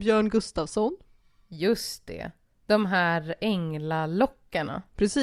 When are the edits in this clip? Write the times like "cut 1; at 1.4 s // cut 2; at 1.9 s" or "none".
none